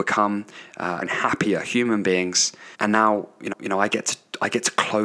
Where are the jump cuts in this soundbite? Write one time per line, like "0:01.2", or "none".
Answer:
0:01.0
0:02.7
0:03.5